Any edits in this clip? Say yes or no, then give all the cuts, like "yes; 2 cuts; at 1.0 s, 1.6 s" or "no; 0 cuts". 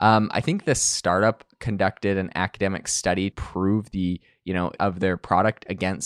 yes; 2 cuts; at 3.3 s, 4.8 s